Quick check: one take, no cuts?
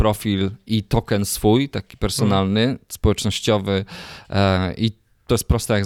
yes; 0 cuts

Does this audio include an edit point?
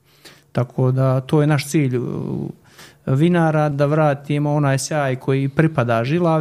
yes; 1 cut; at 3.7 s

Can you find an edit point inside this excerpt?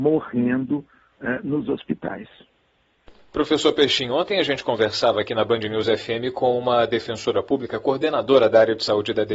no; 0 cuts

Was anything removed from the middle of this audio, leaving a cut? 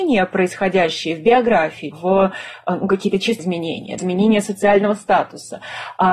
yes; 3 cuts; at 1.9 s, 3.4 s, 4.0 s

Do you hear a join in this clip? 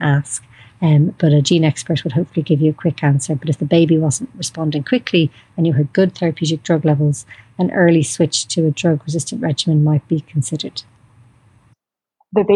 no; 0 cuts

